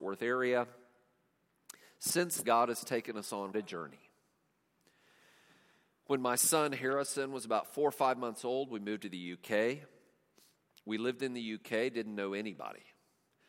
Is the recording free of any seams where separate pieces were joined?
no; 2 cuts; at 2.4 s, 3.5 s

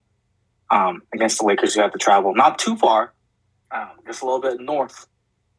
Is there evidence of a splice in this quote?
no; 0 cuts

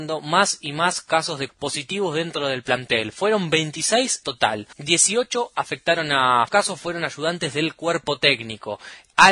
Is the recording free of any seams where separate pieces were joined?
no; 4 cuts; at 1.5 s, 4.2 s, 4.7 s, 6.5 s

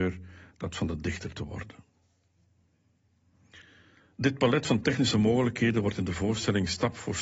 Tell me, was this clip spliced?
no; 0 cuts

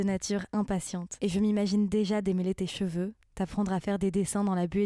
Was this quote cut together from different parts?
no; 0 cuts

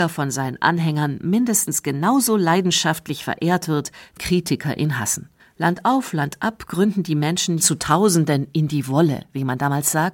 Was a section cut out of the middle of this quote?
yes; 3 cuts; at 4.2 s, 5.4 s, 7.6 s

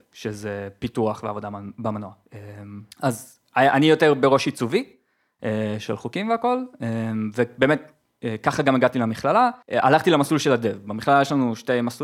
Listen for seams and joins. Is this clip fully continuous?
no; 2 cuts; at 2.9 s, 9.6 s

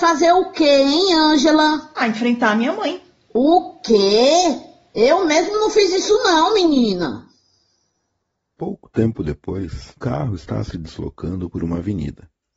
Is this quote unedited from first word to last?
no; 1 cut; at 10.0 s

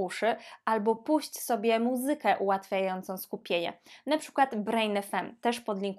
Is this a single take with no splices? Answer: yes; 0 cuts

